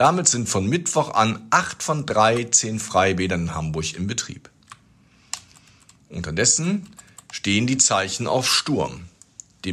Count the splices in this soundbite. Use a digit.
0